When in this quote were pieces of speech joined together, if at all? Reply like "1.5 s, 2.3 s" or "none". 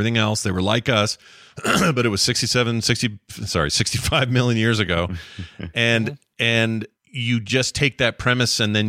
6.9 s